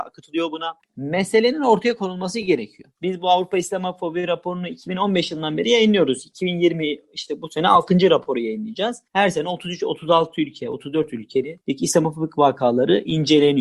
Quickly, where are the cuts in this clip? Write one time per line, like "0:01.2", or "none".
none